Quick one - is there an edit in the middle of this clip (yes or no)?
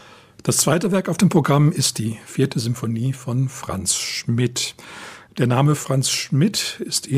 no